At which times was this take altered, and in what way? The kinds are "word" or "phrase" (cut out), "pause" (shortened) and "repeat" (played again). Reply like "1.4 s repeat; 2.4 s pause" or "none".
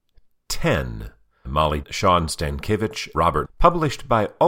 1.4 s word; 1.8 s word; 3.1 s word; 3.4 s word